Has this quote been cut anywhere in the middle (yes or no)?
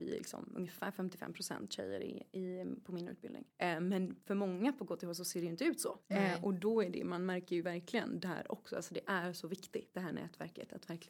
yes